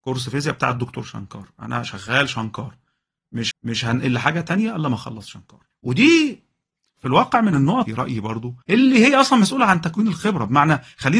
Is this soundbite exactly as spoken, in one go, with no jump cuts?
no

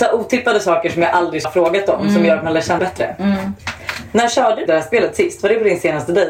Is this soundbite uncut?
no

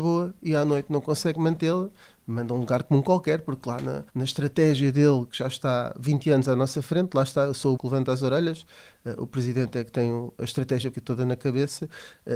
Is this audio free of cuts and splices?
no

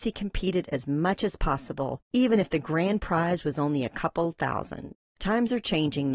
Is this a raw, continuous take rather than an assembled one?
no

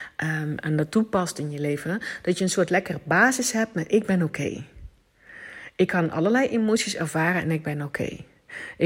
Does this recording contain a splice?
no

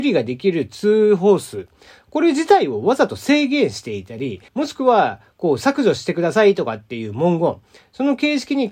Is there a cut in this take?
yes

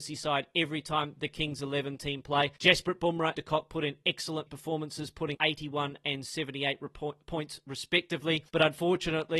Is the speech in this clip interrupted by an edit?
yes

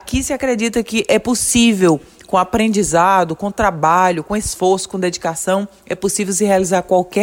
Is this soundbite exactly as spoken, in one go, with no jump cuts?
yes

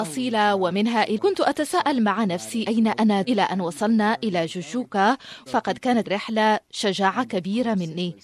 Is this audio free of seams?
no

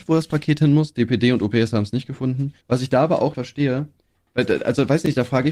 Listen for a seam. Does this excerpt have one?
yes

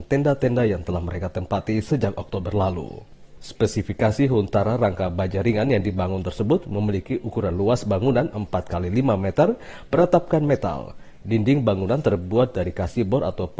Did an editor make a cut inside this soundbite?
no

